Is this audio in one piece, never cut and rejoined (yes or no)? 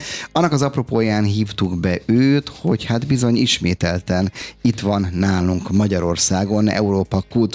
yes